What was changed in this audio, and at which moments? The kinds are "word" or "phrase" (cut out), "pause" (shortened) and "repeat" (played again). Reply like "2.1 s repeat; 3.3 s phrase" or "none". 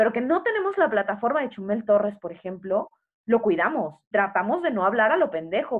4.1 s word